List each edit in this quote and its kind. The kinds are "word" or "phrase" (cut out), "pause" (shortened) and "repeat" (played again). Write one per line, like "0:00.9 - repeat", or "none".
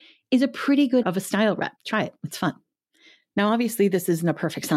0:01.0 - word
0:01.8 - pause